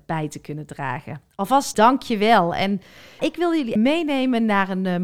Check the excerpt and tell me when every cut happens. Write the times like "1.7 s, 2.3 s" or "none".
1.7 s, 3.2 s, 3.8 s